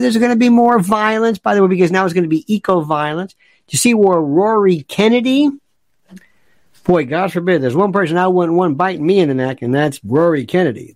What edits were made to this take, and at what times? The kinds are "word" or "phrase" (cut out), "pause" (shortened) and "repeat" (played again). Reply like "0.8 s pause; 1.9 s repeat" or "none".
none